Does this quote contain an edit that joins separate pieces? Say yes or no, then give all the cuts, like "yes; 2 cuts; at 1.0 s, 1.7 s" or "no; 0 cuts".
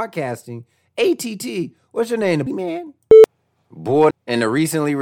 yes; 2 cuts; at 2.5 s, 4.1 s